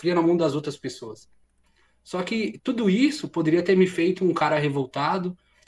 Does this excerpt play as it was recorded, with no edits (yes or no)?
yes